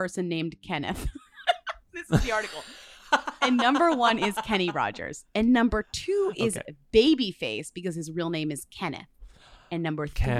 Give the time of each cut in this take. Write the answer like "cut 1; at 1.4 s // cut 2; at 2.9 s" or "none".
none